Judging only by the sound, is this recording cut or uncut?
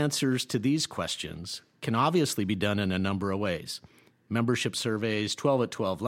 uncut